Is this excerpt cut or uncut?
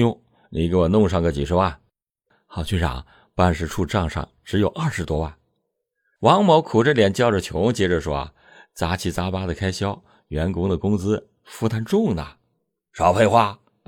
uncut